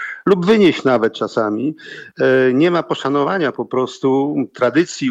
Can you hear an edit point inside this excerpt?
no; 0 cuts

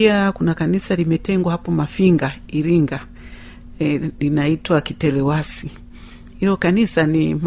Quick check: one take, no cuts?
yes; 0 cuts

